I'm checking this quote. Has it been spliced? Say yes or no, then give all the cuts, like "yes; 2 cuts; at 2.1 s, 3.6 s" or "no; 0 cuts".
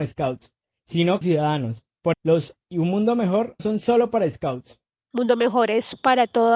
yes; 4 cuts; at 1.2 s, 2.1 s, 2.6 s, 3.6 s